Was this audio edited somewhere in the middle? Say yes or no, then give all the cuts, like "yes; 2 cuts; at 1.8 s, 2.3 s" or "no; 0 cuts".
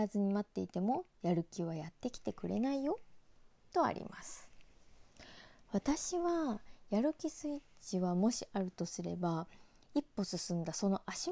no; 0 cuts